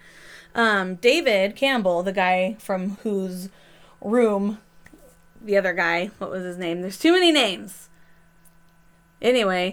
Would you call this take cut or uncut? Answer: uncut